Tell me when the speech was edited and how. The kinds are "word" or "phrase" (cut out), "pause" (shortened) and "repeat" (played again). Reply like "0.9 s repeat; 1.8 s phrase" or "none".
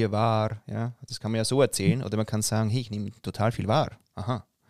none